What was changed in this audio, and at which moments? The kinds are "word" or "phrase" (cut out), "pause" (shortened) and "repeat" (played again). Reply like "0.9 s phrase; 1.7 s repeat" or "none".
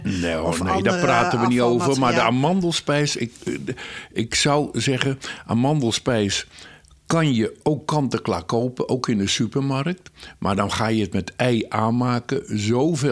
none